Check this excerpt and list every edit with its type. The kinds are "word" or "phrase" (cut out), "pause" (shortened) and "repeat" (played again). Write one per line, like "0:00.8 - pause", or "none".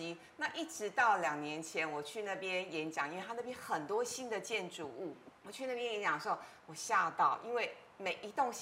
0:05.4 - pause